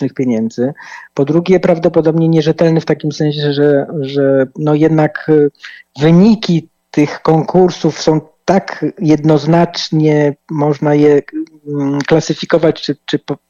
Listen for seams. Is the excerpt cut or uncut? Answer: uncut